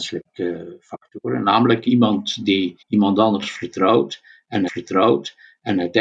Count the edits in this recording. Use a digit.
2